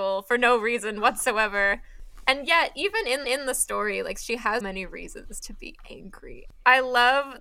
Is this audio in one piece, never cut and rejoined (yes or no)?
no